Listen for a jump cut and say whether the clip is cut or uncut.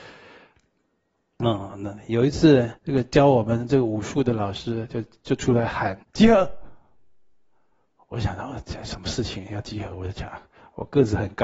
cut